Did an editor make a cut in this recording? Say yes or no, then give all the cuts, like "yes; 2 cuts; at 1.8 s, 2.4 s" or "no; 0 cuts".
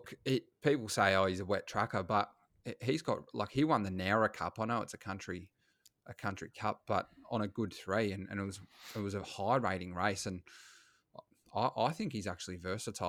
no; 0 cuts